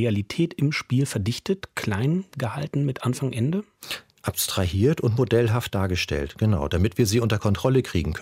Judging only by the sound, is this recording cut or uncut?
uncut